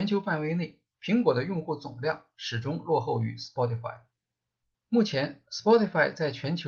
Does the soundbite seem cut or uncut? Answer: cut